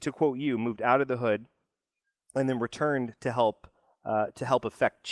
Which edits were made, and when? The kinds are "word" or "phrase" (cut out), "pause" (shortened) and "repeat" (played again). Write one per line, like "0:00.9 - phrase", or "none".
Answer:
none